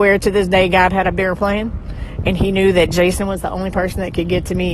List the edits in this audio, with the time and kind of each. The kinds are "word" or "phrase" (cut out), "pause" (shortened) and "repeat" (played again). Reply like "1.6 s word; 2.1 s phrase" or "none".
none